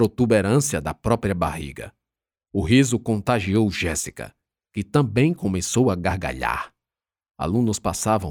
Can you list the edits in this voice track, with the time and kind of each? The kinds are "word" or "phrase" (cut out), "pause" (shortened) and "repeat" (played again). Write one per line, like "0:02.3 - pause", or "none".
none